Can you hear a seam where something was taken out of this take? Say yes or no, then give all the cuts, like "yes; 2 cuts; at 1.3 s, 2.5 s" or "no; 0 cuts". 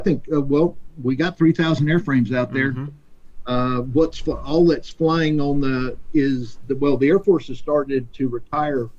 no; 0 cuts